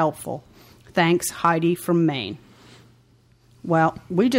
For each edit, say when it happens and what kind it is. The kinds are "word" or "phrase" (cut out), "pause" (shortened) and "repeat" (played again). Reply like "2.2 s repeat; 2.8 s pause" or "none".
none